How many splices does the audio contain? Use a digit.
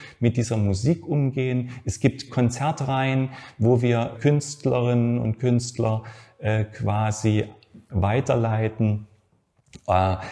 3